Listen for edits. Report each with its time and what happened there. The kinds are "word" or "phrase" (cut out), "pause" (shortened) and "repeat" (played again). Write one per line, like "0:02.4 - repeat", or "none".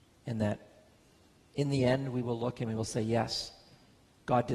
none